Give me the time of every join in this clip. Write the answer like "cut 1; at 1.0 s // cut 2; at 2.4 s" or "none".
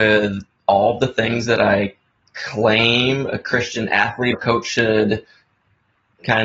cut 1; at 4.3 s